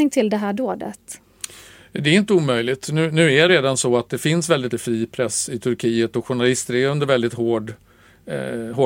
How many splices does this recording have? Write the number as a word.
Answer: two